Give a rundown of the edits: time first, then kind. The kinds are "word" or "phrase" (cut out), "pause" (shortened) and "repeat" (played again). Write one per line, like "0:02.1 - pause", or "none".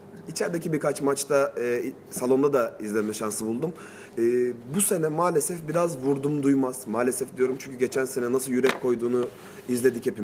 none